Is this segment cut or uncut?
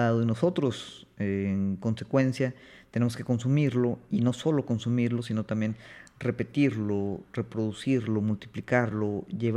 uncut